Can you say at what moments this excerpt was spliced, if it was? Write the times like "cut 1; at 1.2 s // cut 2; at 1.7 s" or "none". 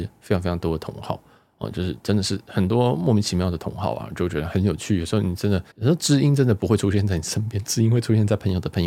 cut 1; at 5.7 s

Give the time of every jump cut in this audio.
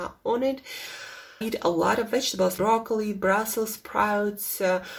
cut 1; at 1.4 s // cut 2; at 2.6 s

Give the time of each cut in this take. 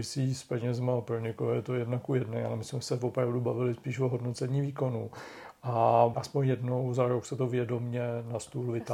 cut 1; at 6.1 s

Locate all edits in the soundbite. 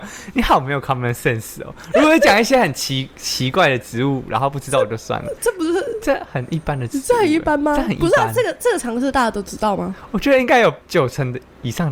cut 1; at 10.8 s

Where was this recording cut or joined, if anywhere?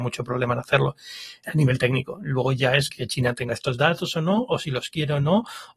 cut 1; at 1.4 s // cut 2; at 2.9 s // cut 3; at 3.5 s

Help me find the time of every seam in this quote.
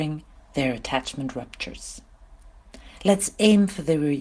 none

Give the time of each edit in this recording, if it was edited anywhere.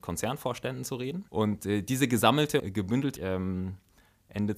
cut 1; at 1.3 s // cut 2; at 2.6 s // cut 3; at 3.2 s

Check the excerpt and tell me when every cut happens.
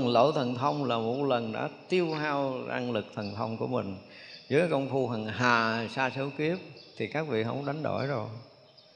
none

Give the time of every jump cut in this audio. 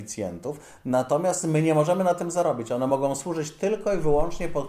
none

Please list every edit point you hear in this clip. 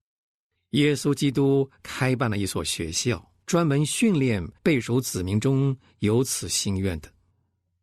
cut 1; at 3.4 s // cut 2; at 4.6 s

